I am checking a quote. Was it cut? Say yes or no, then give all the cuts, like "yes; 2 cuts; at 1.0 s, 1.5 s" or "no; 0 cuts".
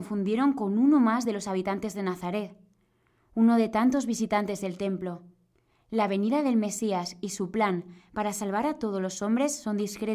no; 0 cuts